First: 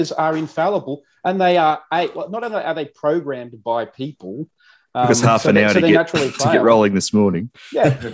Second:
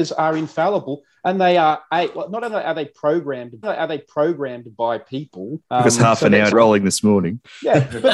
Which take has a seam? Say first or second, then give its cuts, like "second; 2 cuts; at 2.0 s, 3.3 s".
second; 3 cuts; at 3.6 s, 5.6 s, 6.5 s